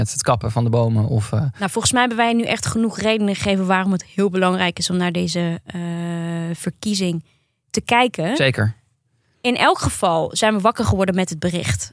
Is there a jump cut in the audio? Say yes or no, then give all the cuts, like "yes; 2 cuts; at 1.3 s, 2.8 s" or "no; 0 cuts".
no; 0 cuts